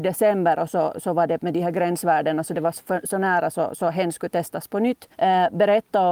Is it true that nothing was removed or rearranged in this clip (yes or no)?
no